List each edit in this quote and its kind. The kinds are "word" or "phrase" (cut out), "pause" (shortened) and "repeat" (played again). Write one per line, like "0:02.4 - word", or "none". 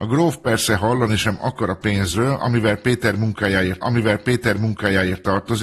0:03.8 - repeat